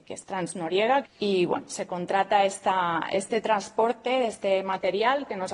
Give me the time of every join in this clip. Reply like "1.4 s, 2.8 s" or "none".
1.0 s